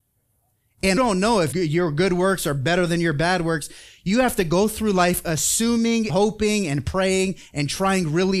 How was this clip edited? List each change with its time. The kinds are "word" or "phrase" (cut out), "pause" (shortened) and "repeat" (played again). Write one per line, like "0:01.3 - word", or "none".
0:01.0 - phrase
0:01.5 - word
0:06.1 - word